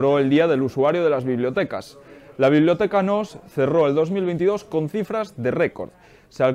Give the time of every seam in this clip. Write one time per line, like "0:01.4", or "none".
none